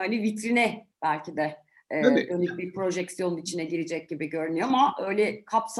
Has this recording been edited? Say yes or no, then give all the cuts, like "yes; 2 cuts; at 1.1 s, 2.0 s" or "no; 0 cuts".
yes; 1 cut; at 0.9 s